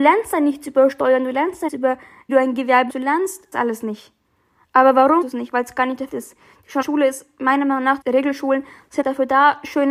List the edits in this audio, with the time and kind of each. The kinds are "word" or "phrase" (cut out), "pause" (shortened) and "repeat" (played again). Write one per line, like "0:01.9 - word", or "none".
0:01.7 - word
0:02.3 - word
0:02.9 - word
0:03.5 - word
0:05.2 - word
0:06.1 - word
0:06.8 - word
0:08.0 - word
0:09.0 - word